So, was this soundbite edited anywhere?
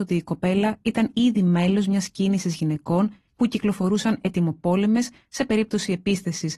no; 0 cuts

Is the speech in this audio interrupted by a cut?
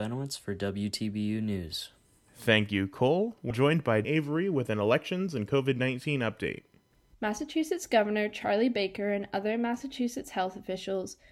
yes; 2 cuts; at 3.5 s, 4.0 s

